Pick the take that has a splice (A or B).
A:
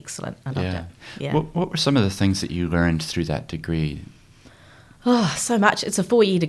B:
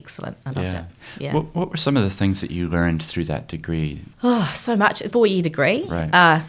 B